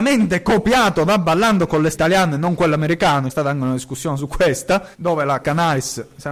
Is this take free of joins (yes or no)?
no